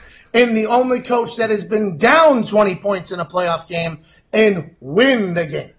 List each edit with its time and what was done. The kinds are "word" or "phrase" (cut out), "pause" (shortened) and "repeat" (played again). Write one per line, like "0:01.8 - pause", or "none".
none